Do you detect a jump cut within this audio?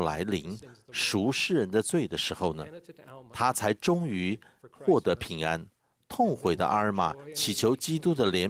no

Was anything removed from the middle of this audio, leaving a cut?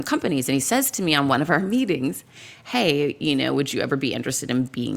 no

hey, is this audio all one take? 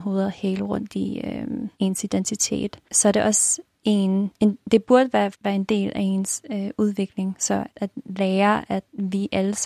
no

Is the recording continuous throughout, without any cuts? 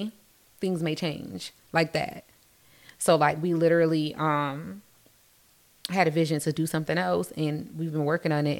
yes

